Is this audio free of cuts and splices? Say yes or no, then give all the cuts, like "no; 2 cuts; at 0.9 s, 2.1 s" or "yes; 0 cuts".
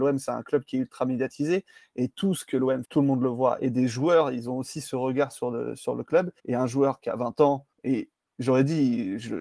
no; 3 cuts; at 2.8 s, 6.4 s, 7.7 s